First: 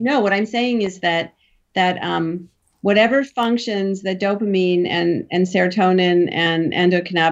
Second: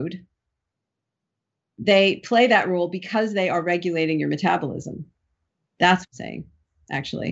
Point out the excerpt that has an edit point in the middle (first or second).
second